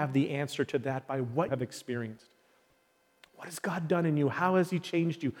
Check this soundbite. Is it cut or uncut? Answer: cut